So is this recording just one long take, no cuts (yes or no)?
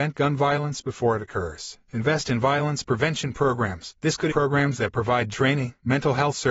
no